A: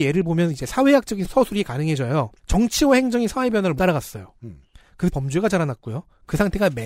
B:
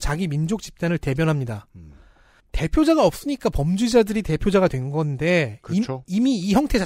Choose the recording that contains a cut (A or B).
A